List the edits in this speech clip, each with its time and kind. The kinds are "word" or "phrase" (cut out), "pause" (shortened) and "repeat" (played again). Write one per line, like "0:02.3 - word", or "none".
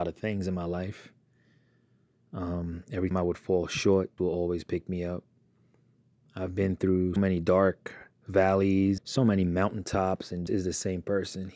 0:03.1 - word
0:04.2 - word
0:07.2 - word
0:09.0 - word
0:10.5 - word